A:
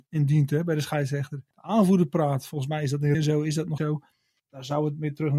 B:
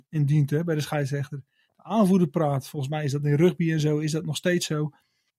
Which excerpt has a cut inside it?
A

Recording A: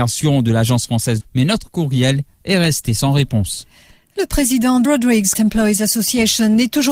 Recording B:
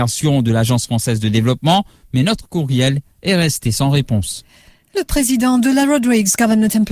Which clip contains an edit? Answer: A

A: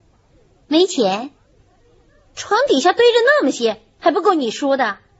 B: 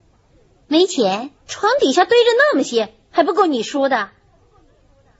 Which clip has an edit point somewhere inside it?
B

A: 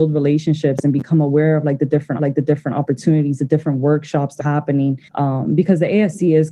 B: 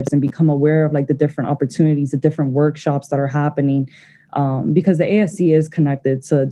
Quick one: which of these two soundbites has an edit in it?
A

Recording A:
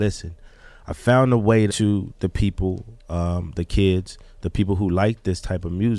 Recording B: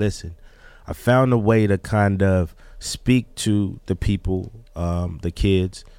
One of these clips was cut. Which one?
A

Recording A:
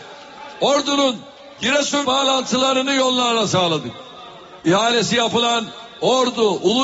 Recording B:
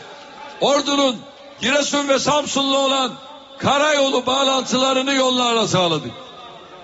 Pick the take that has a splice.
A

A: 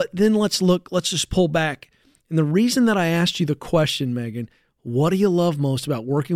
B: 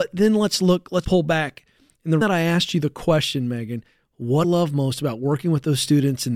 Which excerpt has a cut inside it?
B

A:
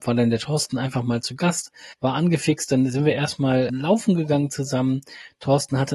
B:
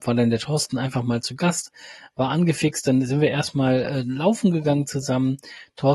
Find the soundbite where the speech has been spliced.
A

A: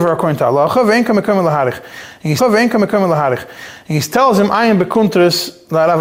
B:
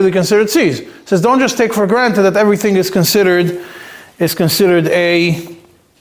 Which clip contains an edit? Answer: A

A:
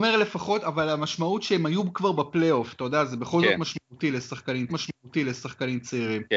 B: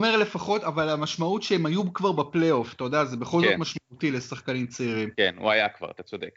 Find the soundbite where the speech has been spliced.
A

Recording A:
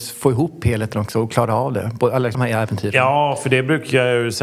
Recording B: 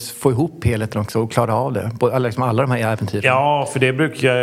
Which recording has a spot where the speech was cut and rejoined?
A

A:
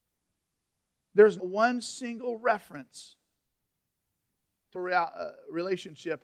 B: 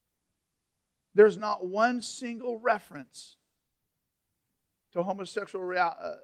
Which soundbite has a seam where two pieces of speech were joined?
A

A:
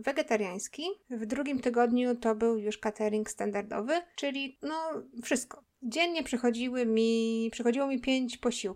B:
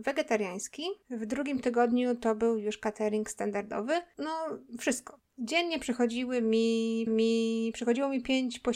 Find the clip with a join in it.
B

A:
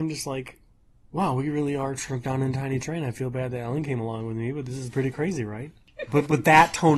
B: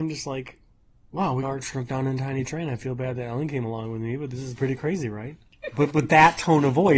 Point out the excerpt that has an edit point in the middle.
B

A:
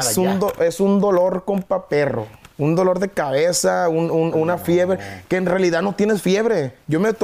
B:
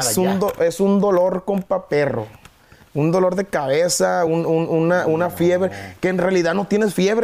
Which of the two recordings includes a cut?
A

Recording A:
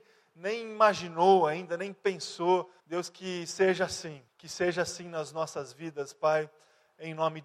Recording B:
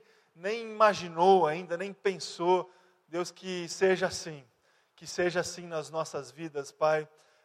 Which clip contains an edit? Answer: A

